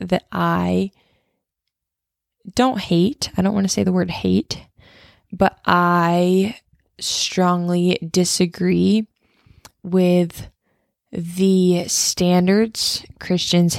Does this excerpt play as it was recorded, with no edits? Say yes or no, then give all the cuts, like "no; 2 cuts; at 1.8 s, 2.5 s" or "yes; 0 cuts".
yes; 0 cuts